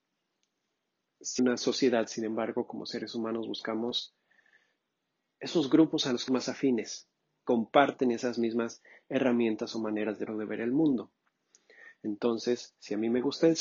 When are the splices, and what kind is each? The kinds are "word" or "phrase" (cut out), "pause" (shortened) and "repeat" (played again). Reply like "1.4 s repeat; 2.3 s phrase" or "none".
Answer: 1.4 s word; 6.3 s word; 7.5 s word; 10.3 s word